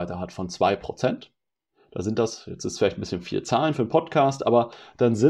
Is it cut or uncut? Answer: uncut